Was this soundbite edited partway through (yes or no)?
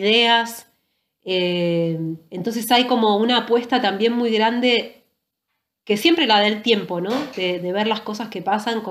no